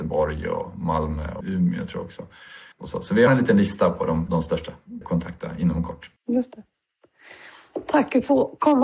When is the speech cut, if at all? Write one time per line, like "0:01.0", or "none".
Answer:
0:01.4
0:02.7
0:03.3
0:04.3
0:05.0
0:06.2

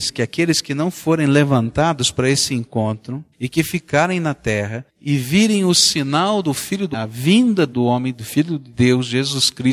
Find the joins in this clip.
0:03.3
0:04.9
0:06.9
0:07.7

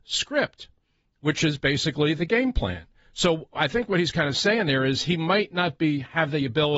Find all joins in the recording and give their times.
none

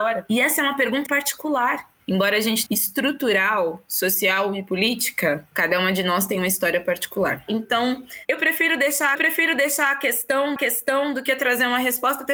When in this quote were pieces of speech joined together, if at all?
0:01.1
0:02.7
0:09.1
0:10.6

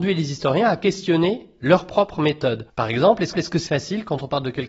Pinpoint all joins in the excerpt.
0:02.7
0:03.3
0:03.7

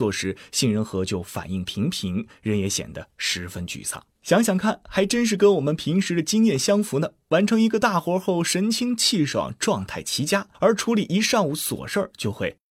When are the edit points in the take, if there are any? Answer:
0:04.2
0:10.5

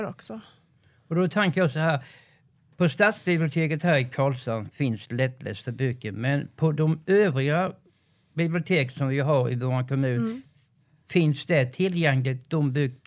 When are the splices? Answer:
none

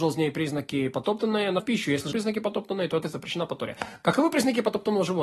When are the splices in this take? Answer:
0:01.6
0:02.1
0:03.0

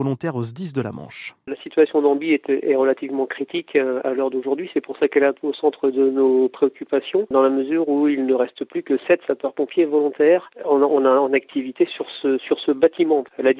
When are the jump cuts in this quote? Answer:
none

